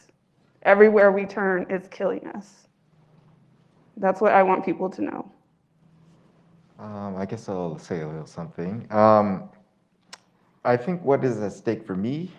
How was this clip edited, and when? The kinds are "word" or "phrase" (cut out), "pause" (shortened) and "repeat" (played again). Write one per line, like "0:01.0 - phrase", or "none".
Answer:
none